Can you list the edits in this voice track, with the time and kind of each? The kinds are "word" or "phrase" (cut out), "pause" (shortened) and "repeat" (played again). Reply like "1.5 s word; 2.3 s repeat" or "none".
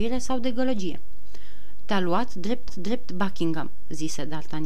2.7 s repeat